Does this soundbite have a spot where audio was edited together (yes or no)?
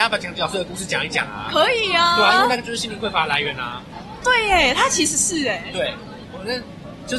yes